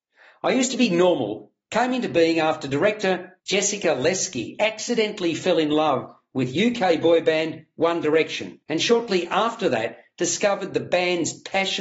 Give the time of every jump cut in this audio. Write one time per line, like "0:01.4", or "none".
0:03.4
0:08.6